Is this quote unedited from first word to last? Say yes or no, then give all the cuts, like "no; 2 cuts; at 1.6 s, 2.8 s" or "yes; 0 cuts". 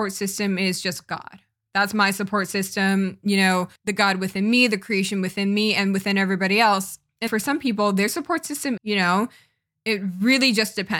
no; 3 cuts; at 3.8 s, 7.3 s, 8.8 s